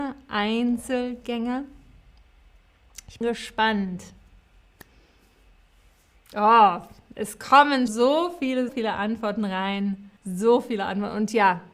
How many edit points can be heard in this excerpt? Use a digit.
4